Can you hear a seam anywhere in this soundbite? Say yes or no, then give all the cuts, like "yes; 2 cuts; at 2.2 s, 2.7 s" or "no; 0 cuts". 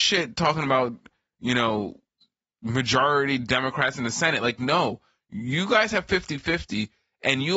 no; 0 cuts